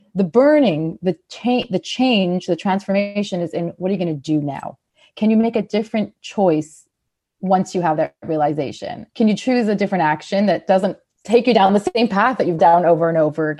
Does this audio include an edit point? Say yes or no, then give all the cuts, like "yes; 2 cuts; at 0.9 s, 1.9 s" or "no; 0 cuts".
yes; 2 cuts; at 9.1 s, 12.6 s